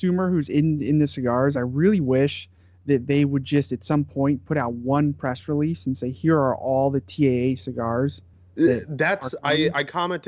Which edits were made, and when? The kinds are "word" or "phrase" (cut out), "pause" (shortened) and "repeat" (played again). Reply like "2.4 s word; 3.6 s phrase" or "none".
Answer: none